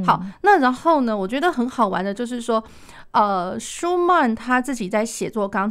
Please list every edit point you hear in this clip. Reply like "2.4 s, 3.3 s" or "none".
none